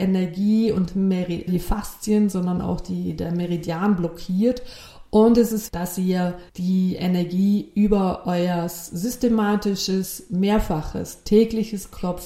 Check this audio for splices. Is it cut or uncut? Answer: cut